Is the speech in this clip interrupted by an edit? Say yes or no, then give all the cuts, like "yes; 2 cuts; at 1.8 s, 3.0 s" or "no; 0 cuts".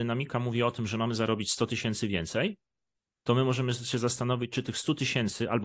no; 0 cuts